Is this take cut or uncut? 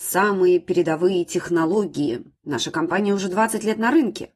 cut